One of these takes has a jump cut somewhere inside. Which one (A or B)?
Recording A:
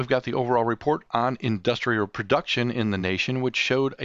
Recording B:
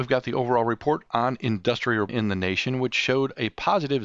B